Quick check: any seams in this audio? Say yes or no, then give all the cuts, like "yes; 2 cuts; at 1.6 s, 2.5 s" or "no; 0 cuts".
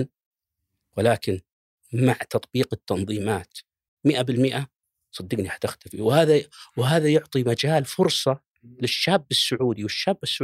no; 0 cuts